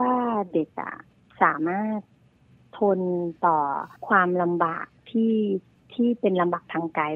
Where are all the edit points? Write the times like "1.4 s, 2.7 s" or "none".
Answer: 4.0 s